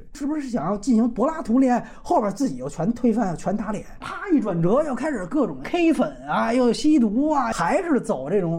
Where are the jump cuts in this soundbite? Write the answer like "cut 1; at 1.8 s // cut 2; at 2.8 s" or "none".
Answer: none